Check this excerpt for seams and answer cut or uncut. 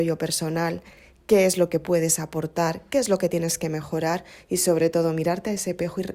uncut